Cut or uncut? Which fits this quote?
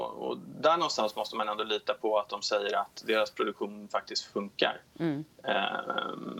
uncut